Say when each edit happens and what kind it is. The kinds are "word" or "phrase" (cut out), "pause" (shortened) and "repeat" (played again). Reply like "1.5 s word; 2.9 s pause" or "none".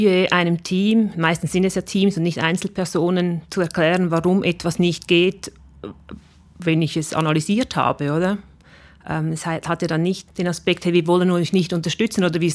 none

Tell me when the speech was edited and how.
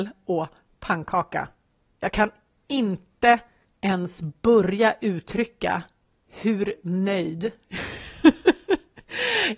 none

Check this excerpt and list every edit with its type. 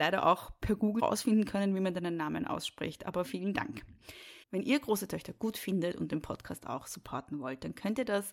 1.0 s word; 3.2 s word; 4.4 s pause

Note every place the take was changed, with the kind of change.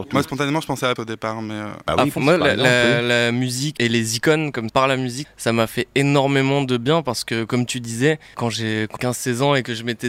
1.0 s word; 2.2 s word; 3.8 s word; 4.7 s word; 5.2 s word; 8.3 s word; 9.0 s word

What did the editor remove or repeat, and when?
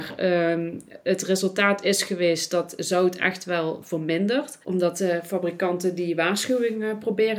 4.6 s pause

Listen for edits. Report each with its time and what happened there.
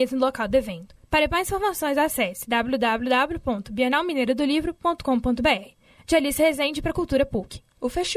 none

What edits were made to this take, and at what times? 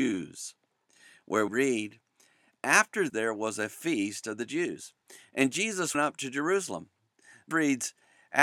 1.5 s word; 3.1 s word; 5.9 s word; 7.5 s word

